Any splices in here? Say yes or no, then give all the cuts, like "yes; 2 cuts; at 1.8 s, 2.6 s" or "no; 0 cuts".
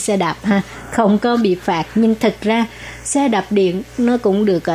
no; 0 cuts